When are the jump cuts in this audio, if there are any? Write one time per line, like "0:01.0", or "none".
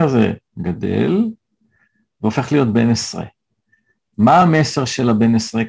none